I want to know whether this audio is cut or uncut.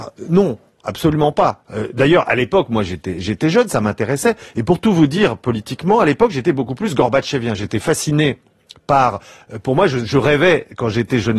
uncut